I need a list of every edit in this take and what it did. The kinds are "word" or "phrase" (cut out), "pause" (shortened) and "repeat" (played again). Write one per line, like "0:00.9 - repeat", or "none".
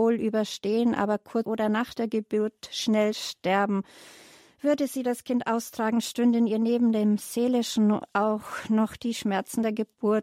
0:01.4 - phrase